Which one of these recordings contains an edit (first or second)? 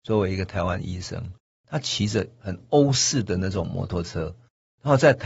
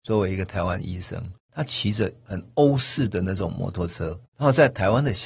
second